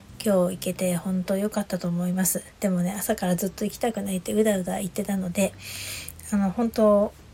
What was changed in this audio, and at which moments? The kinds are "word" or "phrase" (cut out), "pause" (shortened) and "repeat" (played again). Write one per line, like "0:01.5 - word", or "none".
0:02.5 - pause